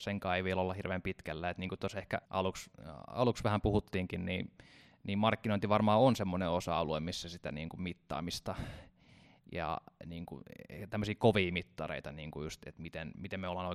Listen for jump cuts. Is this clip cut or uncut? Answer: cut